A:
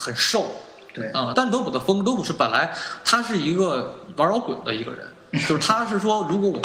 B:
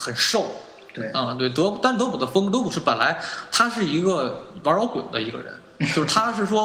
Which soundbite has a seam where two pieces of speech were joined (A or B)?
A